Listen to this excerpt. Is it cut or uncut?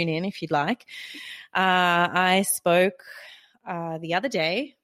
uncut